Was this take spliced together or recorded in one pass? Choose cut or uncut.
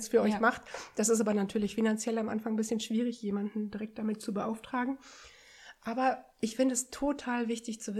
uncut